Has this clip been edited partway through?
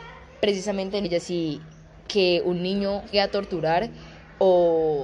yes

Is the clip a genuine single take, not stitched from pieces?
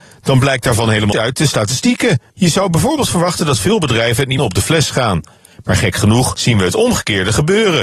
no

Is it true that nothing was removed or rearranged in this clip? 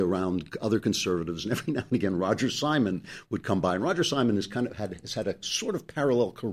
yes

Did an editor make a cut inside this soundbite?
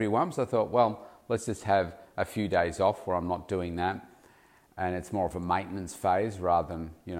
no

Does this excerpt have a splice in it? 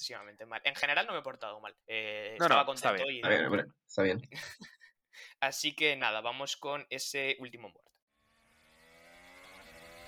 yes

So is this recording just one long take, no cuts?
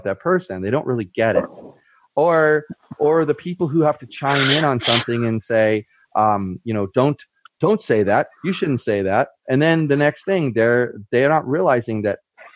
yes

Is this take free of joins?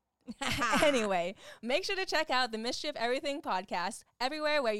yes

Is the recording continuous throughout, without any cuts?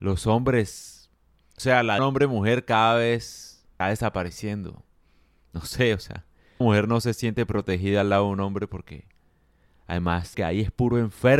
no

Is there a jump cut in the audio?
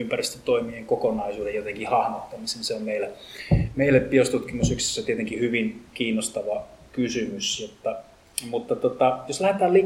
no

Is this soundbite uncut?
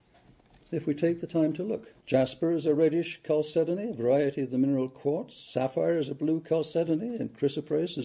no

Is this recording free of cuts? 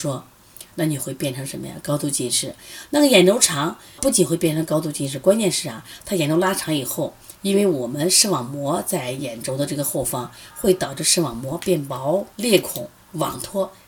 no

